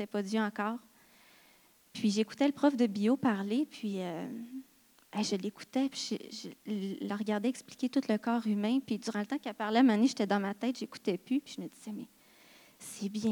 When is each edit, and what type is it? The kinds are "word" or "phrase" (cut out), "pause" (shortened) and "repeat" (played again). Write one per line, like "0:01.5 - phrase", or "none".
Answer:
none